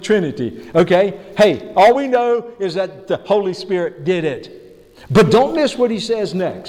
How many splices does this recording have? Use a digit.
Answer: 0